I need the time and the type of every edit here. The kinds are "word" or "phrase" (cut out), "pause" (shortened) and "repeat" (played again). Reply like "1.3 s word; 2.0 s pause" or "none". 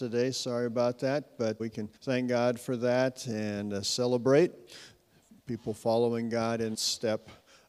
1.6 s word; 2.0 s pause; 6.7 s word